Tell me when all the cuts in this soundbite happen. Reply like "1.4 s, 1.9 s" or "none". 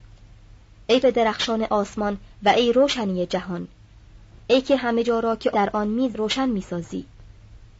1.0 s, 5.5 s, 6.1 s